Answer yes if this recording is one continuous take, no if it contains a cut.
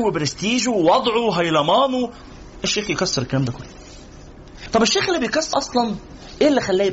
no